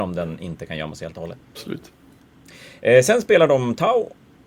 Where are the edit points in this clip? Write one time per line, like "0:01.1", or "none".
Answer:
0:01.4